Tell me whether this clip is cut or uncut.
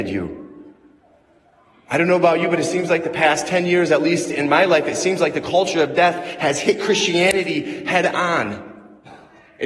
uncut